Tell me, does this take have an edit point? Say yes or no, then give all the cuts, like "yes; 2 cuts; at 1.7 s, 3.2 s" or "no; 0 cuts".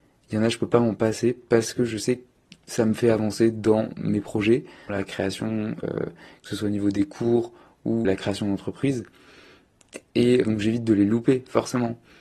yes; 4 cuts; at 4.9 s, 5.8 s, 8.0 s, 10.4 s